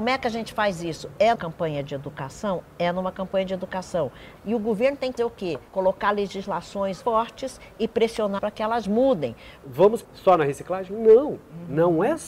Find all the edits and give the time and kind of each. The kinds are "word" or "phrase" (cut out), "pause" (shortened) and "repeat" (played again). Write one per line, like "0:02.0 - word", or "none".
0:01.4 - word
0:05.2 - word
0:05.7 - pause
0:07.0 - word
0:08.4 - phrase
0:10.0 - word